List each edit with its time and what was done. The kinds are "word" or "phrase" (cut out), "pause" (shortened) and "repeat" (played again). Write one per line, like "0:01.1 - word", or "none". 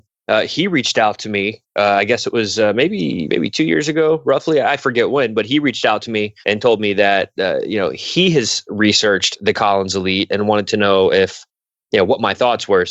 0:06.4 - pause